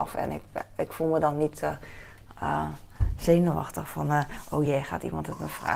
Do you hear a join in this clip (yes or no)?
no